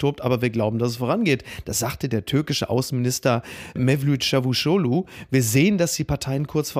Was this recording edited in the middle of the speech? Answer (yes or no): no